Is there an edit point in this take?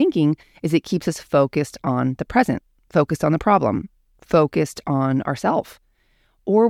no; 0 cuts

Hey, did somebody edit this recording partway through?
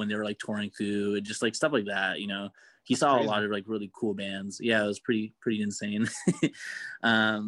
no; 0 cuts

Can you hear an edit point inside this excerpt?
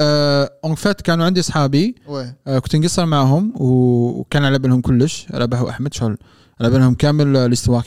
no; 0 cuts

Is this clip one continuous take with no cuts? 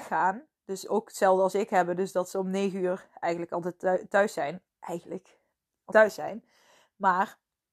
no; 1 cut; at 5.9 s

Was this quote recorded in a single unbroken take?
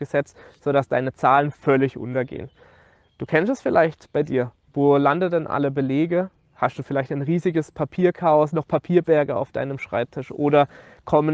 yes; 0 cuts

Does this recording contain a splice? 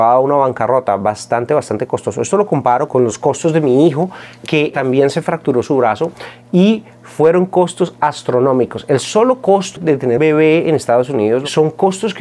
yes; 2 cuts; at 9.8 s, 10.2 s

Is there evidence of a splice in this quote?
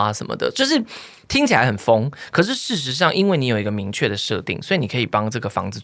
no; 0 cuts

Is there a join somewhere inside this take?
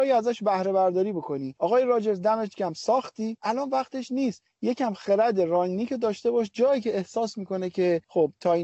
no; 0 cuts

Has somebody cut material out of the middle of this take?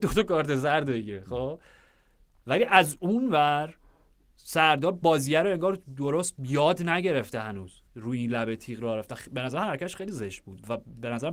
yes; 1 cut; at 7.9 s

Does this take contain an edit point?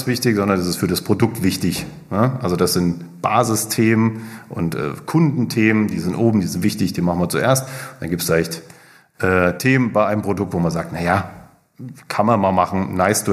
no; 0 cuts

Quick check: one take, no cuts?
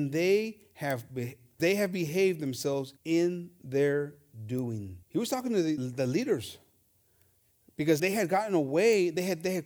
no; 5 cuts; at 1.6 s, 3.0 s, 5.0 s, 5.8 s, 8.0 s

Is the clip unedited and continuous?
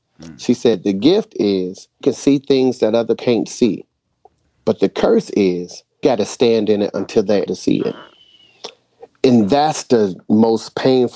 no; 5 cuts; at 2.0 s, 3.2 s, 6.0 s, 6.9 s, 7.5 s

